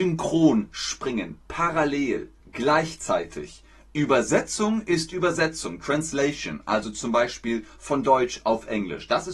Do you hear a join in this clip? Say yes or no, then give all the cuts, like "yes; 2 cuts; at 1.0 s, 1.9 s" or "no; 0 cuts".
yes; 1 cut; at 2.4 s